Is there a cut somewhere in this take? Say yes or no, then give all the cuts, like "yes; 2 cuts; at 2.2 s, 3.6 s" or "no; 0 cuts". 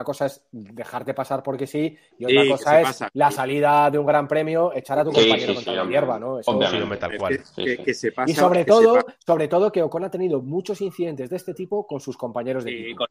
no; 0 cuts